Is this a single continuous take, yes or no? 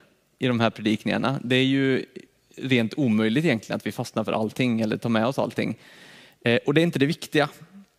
yes